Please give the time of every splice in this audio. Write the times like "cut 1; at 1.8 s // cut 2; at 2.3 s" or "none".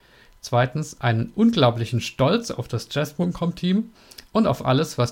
none